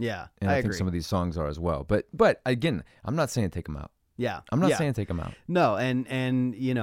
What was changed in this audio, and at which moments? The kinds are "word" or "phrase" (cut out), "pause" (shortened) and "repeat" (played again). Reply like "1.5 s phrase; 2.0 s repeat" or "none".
none